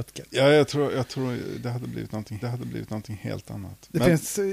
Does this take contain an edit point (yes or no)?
yes